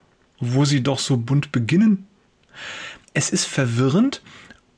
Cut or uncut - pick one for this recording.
cut